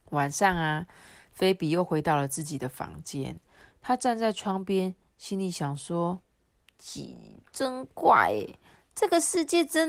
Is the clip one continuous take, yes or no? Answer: yes